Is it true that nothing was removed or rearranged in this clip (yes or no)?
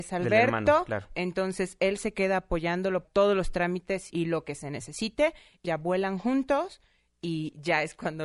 no